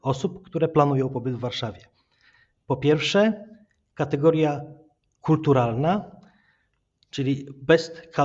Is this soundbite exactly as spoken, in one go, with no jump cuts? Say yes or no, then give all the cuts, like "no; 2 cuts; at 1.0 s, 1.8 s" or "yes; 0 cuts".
yes; 0 cuts